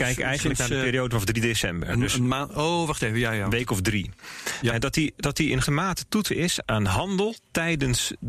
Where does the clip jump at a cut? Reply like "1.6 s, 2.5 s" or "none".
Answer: 5.6 s, 6.3 s, 6.6 s